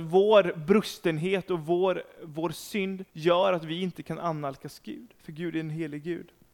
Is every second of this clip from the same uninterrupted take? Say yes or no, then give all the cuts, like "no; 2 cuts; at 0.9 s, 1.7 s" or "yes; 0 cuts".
no; 1 cut; at 3.1 s